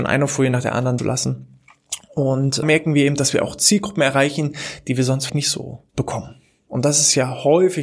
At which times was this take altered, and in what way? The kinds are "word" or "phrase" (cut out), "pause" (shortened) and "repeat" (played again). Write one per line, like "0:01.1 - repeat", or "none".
0:01.0 - phrase
0:02.6 - phrase
0:05.3 - word
0:05.9 - pause